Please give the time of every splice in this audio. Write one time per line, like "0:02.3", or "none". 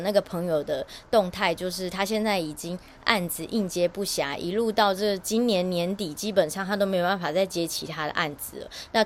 none

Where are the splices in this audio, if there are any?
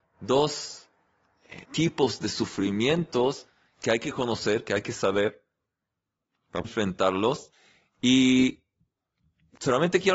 0:01.6
0:06.6

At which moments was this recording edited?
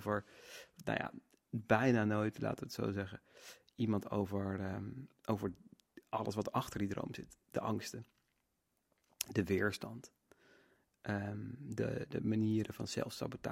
none

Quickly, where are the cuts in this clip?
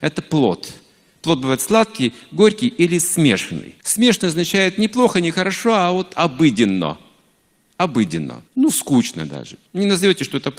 0:03.8
0:08.5
0:09.7

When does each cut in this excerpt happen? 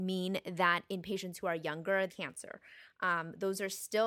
0:02.1

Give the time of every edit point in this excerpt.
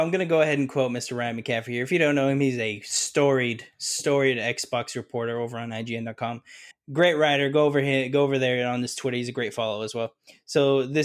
0:06.7

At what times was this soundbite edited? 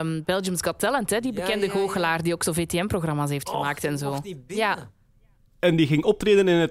none

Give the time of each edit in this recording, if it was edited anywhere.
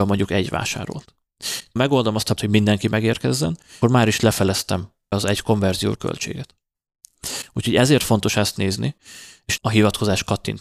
0:01.8
0:02.4
0:03.8
0:05.1
0:05.9
0:09.6

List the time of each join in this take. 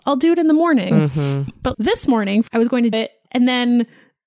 0:01.7
0:02.5
0:02.9

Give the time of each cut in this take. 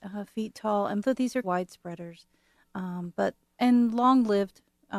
0:01.0
0:01.4
0:03.4

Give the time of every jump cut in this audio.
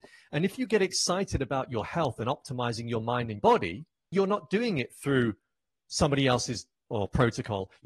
0:03.4
0:04.1
0:06.9

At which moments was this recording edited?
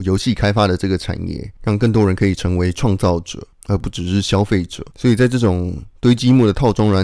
0:04.9

